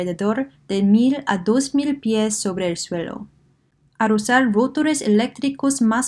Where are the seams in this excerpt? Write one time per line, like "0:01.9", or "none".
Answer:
none

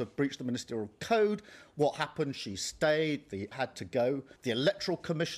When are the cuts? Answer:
0:03.5
0:04.4

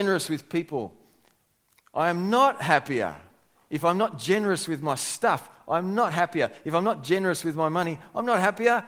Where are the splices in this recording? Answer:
none

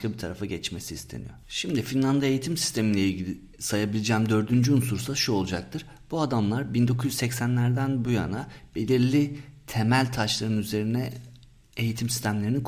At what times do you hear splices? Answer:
0:01.4

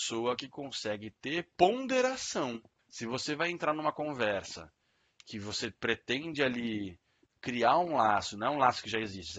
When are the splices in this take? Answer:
0:02.8

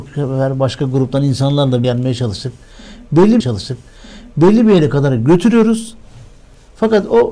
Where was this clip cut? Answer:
0:01.8
0:03.4

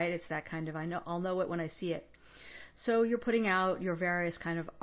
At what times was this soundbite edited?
none

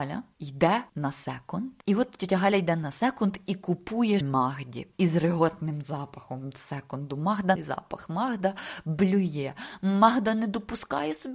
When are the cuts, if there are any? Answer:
0:04.2
0:07.6

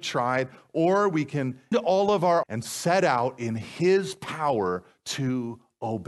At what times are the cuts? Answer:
0:01.7
0:02.4

